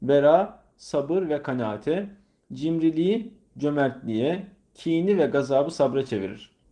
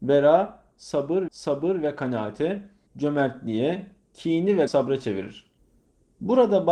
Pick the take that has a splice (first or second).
second